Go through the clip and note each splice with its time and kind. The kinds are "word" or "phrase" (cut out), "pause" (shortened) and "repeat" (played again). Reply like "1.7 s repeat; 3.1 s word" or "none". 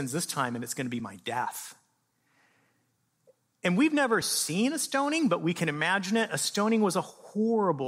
none